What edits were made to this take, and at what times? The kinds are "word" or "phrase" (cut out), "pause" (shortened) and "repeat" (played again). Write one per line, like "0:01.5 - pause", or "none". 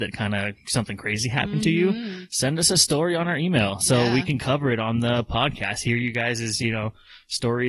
none